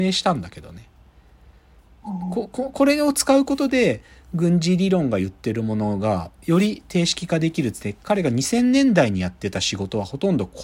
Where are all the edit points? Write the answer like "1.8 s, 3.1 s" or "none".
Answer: none

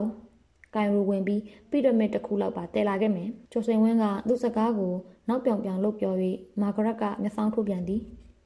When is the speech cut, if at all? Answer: 3.4 s

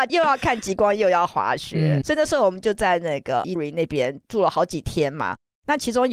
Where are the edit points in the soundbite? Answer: 2.0 s, 3.6 s

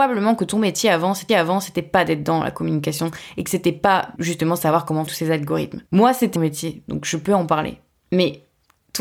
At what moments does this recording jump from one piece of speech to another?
1.3 s, 4.2 s, 5.1 s, 5.9 s, 6.4 s

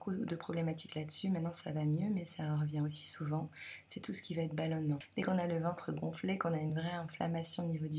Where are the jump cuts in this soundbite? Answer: none

